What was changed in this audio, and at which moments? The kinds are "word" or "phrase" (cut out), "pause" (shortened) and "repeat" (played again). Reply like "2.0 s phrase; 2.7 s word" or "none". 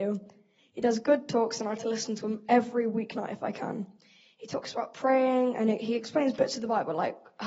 1.8 s word